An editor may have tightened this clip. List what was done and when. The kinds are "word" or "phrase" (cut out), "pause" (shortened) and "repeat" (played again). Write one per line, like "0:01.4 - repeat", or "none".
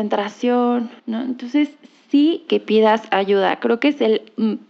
0:01.0 - pause
0:02.5 - phrase